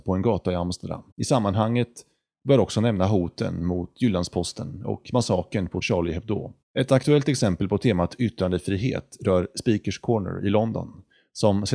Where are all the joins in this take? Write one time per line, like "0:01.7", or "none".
0:01.1
0:05.8
0:06.6